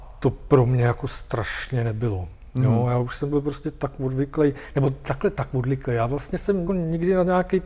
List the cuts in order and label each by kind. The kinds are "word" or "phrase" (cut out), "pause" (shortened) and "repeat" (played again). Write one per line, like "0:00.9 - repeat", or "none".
0:06.7 - word

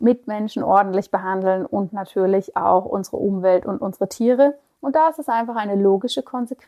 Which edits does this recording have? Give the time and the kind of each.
none

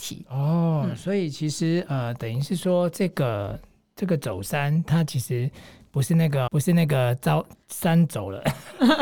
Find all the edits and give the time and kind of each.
0:06.5 - word
0:07.6 - pause

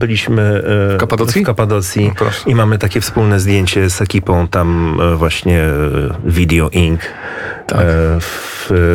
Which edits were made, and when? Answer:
none

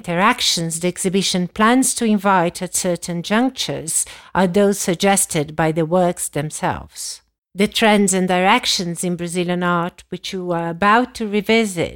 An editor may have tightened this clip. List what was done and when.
0:07.4 - pause

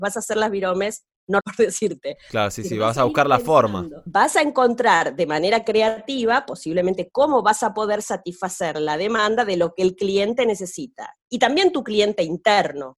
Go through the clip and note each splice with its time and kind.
0:01.4 - word

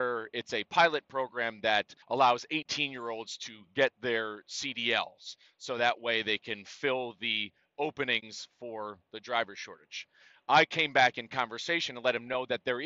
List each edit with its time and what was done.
0:02.0 - pause

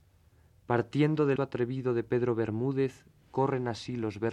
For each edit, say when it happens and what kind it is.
0:01.4 - word

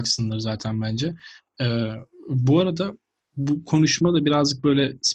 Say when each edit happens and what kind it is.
none

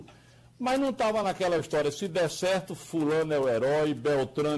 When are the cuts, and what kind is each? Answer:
none

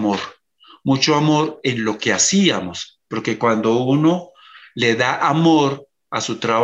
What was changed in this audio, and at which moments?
none

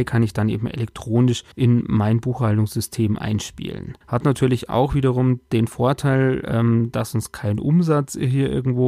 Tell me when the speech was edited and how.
0:01.5 - pause
0:04.0 - pause

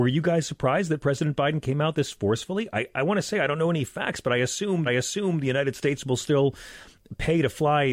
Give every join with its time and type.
0:02.9 - word
0:04.9 - repeat

